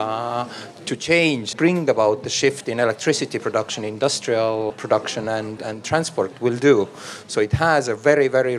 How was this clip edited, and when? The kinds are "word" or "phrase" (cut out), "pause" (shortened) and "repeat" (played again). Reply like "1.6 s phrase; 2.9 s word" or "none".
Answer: 1.5 s word; 4.7 s word; 5.6 s word